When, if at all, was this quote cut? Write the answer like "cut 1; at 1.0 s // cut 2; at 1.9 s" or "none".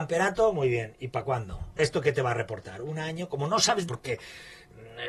cut 1; at 1.8 s // cut 2; at 3.9 s